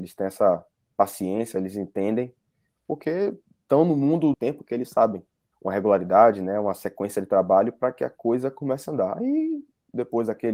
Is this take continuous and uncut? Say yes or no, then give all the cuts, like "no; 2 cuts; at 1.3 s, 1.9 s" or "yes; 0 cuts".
no; 2 cuts; at 4.3 s, 5.5 s